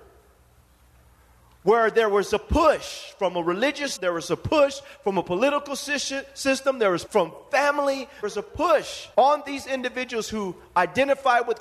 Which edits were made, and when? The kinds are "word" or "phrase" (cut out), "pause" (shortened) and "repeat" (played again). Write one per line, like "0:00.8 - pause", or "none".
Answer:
0:04.0 - word
0:07.1 - word
0:08.2 - word
0:09.1 - pause